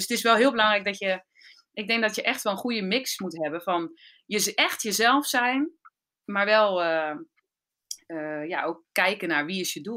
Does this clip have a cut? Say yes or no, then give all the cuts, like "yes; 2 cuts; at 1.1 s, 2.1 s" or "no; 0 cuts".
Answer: no; 0 cuts